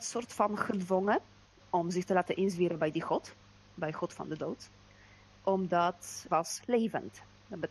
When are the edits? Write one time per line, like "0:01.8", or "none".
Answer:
0:06.3